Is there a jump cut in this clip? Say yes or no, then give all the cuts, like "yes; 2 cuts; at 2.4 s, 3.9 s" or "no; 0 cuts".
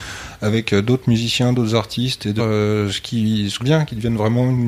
yes; 2 cuts; at 2.4 s, 3.6 s